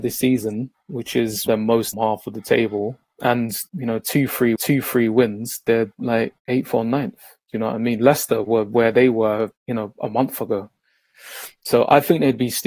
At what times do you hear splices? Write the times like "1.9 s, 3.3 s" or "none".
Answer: 1.5 s, 1.9 s, 3.7 s, 4.6 s, 6.4 s, 9.6 s